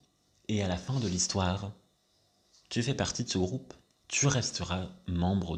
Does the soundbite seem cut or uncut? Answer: uncut